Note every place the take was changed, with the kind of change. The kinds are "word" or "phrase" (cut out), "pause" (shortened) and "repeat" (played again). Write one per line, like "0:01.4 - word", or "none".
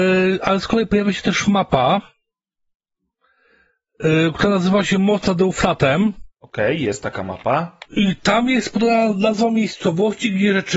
0:06.3 - pause
0:07.8 - pause